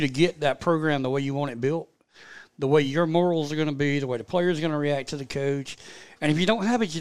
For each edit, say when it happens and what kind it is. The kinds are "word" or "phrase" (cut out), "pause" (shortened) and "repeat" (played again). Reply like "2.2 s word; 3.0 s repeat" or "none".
none